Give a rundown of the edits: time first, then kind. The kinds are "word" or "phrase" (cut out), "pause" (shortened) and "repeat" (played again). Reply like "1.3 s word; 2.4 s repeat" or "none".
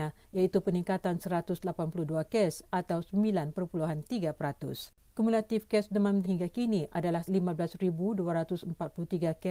1.2 s word; 6.2 s phrase; 7.3 s word